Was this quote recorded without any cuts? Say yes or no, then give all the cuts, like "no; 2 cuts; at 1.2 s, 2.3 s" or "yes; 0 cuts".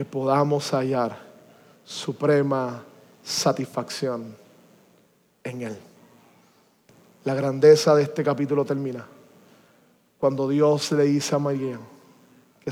yes; 0 cuts